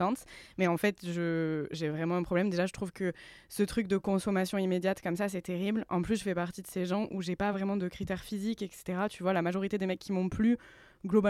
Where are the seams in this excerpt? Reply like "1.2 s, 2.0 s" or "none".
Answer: none